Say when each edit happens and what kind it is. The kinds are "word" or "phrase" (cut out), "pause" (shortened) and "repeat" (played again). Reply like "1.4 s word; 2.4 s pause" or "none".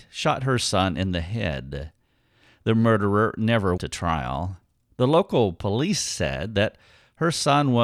3.8 s word